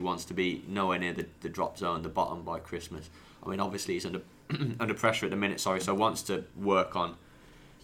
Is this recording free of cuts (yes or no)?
yes